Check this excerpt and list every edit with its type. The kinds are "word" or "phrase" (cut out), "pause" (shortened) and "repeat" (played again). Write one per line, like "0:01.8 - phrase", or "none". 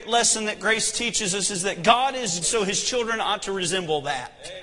0:02.4 - word